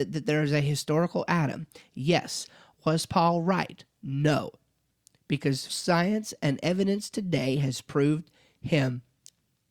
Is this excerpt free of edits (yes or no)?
no